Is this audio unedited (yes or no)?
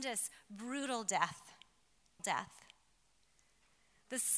no